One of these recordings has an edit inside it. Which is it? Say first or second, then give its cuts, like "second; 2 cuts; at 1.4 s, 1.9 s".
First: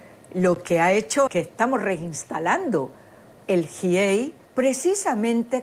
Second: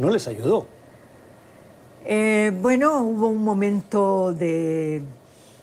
first; 2 cuts; at 1.3 s, 4.4 s